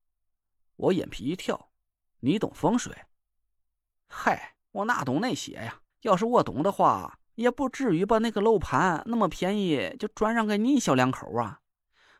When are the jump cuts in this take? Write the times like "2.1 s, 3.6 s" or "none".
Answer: 1.8 s, 4.6 s, 5.9 s